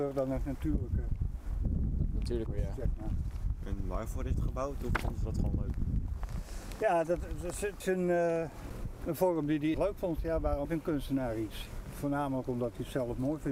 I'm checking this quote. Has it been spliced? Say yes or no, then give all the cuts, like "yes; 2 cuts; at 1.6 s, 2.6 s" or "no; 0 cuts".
yes; 5 cuts; at 2.5 s, 4.3 s, 7.8 s, 9.7 s, 10.6 s